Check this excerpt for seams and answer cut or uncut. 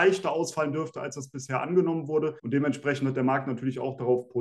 cut